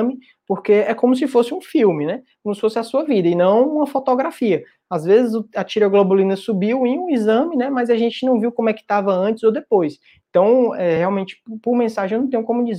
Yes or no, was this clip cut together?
no